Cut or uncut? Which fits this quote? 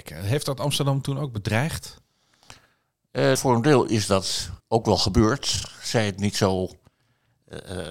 cut